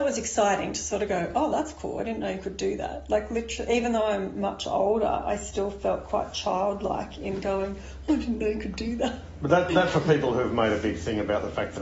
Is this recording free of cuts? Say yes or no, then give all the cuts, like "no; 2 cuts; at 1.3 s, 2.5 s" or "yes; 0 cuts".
no; 1 cut; at 9.7 s